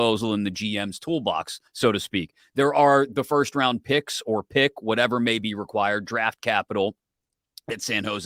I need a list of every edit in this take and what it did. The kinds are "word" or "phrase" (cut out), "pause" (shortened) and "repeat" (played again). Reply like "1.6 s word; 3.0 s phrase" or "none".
1.7 s pause